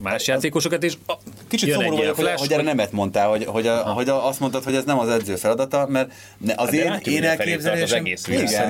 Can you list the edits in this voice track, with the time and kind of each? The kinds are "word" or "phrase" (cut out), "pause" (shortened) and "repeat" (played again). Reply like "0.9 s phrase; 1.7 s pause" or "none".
none